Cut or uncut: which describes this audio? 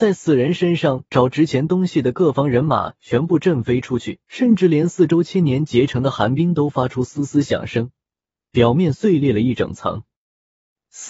cut